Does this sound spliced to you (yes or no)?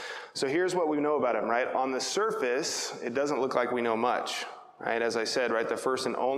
no